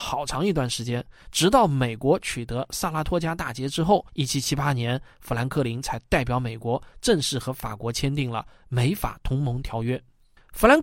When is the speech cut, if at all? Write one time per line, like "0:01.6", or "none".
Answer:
0:04.1